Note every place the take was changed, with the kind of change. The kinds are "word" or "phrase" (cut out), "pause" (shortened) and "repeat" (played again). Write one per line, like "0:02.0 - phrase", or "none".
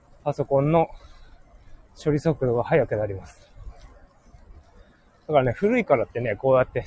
none